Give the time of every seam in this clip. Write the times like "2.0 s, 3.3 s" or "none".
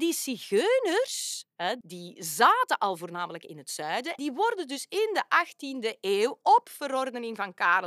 1.8 s, 4.2 s